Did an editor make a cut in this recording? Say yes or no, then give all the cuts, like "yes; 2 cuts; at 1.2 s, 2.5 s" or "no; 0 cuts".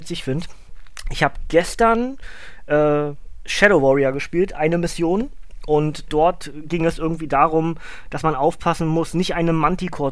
no; 0 cuts